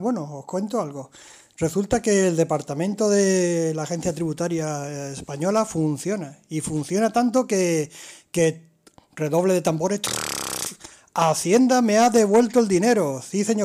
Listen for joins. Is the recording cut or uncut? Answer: uncut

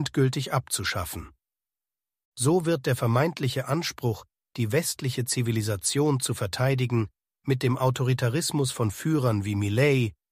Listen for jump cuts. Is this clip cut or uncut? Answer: uncut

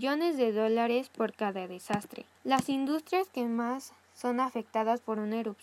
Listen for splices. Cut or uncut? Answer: cut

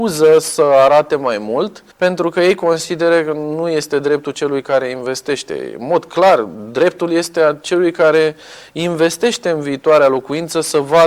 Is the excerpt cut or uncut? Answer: cut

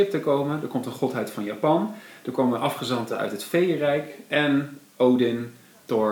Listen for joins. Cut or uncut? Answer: uncut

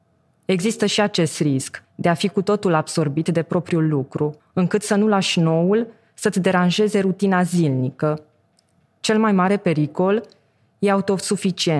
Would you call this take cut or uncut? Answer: cut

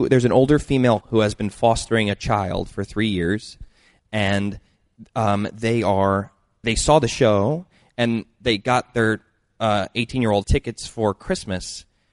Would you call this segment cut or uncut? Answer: cut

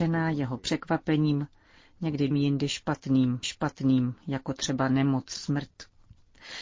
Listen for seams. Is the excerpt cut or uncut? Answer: cut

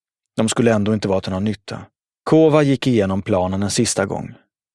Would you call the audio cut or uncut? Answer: cut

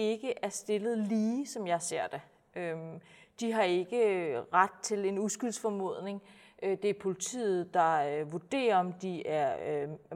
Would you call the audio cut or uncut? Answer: uncut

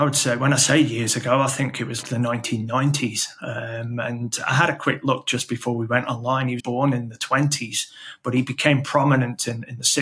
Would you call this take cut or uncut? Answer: cut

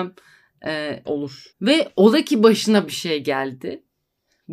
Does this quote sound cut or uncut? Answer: cut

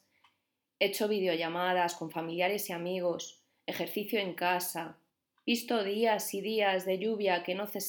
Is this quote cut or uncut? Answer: uncut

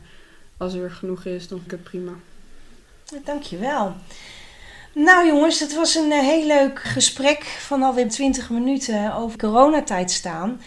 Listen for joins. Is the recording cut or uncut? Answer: cut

